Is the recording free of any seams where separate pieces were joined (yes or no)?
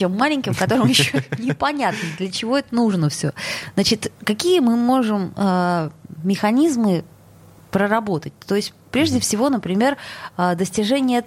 yes